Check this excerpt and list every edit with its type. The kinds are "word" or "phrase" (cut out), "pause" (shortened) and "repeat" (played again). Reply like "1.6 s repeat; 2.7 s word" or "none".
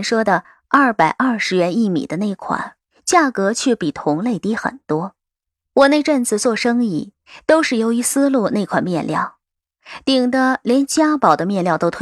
2.9 s phrase